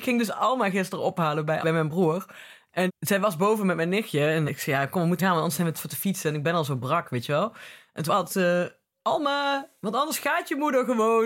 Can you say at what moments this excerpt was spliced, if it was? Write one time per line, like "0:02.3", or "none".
0:01.6
0:02.9
0:04.5
0:05.2
0:05.7
0:08.1